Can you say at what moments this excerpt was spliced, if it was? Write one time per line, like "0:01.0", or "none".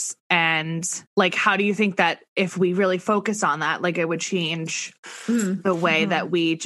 0:01.1